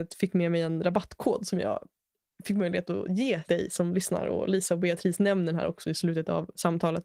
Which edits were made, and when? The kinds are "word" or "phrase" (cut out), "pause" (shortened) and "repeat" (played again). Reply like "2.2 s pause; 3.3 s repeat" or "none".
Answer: 3.5 s word